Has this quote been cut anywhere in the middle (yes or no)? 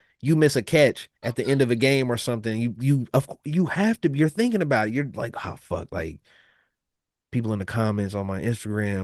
yes